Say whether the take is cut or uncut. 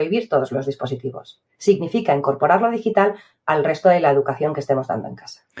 uncut